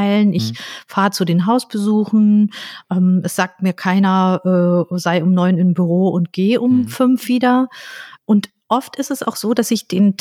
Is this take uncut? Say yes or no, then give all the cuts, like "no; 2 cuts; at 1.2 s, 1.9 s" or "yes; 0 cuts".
no; 1 cut; at 8.2 s